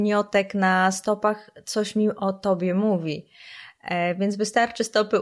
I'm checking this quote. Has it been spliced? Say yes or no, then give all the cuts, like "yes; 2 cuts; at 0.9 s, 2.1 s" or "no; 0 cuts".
no; 0 cuts